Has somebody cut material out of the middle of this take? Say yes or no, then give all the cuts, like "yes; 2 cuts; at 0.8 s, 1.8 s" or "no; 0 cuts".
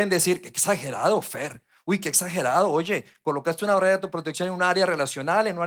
no; 0 cuts